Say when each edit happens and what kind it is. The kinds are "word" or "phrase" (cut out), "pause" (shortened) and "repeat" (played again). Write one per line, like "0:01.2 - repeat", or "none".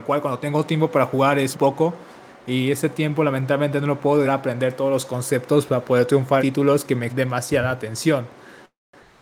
0:01.5 - word
0:04.3 - word
0:06.4 - word
0:07.1 - word